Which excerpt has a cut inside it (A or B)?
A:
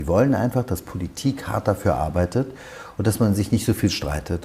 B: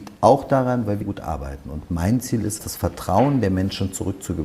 B